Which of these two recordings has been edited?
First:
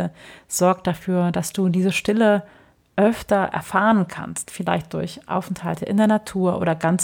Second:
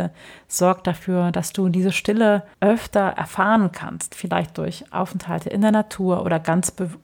second; 1 cut; at 2.5 s

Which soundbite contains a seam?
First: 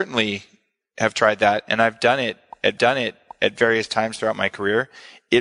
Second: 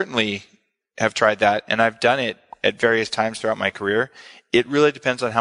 first; 1 cut; at 2.8 s

